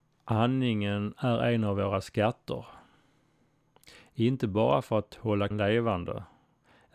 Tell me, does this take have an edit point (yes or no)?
yes